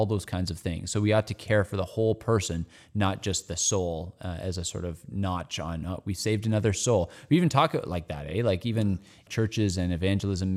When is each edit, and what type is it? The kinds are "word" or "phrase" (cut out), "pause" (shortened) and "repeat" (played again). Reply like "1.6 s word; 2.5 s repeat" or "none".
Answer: none